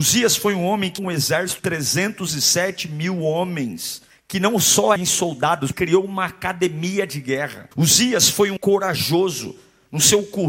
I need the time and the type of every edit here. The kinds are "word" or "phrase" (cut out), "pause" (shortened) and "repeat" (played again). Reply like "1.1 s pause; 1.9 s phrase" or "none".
1.0 s word; 1.6 s word; 4.1 s pause; 5.0 s phrase; 5.7 s phrase; 7.7 s pause; 8.6 s word